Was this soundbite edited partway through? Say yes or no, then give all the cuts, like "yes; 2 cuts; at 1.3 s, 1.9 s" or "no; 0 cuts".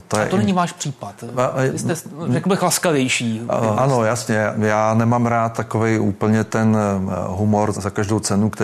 yes; 3 cuts; at 1.7 s, 3.8 s, 7.7 s